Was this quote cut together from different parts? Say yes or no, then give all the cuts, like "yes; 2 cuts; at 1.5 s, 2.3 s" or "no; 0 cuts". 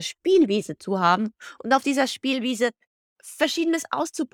no; 0 cuts